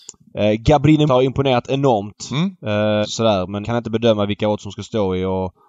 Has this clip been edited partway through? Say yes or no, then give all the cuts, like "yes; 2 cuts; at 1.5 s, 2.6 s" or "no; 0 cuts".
yes; 3 cuts; at 1.1 s, 3.0 s, 3.6 s